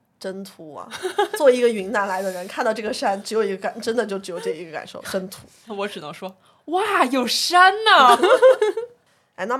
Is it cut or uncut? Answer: uncut